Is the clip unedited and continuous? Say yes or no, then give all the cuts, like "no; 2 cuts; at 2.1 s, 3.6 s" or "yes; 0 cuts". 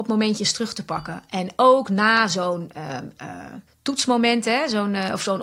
no; 1 cut; at 3.7 s